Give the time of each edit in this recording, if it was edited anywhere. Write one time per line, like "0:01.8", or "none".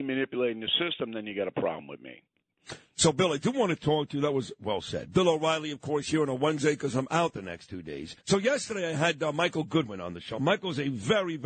0:08.2